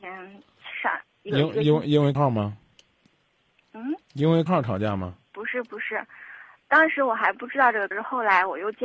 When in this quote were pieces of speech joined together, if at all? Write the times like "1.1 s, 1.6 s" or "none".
2.1 s, 4.0 s, 4.5 s, 5.3 s, 7.9 s